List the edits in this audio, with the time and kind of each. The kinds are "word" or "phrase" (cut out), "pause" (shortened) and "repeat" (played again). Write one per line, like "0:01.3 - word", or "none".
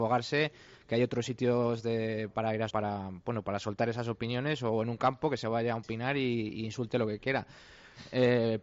0:02.7 - word